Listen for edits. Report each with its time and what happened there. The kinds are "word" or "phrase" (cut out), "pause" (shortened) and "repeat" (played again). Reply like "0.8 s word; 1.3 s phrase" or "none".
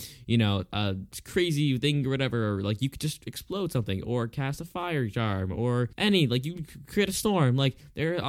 5.9 s pause